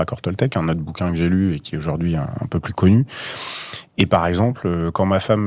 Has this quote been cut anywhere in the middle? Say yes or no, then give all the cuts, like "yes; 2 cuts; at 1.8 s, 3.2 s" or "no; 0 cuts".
no; 0 cuts